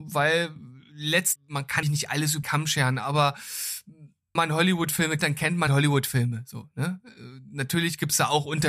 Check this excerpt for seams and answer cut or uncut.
cut